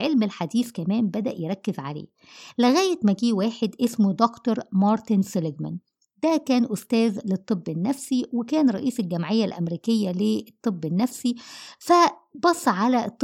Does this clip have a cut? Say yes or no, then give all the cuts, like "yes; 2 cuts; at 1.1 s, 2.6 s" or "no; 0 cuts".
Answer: no; 0 cuts